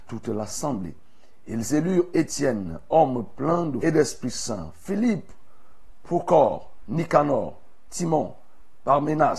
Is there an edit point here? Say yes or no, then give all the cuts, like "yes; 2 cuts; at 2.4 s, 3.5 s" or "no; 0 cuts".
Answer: yes; 1 cut; at 3.8 s